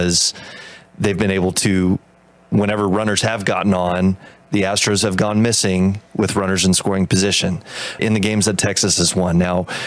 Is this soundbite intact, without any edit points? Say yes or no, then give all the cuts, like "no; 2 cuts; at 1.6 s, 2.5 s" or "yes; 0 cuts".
no; 1 cut; at 8.0 s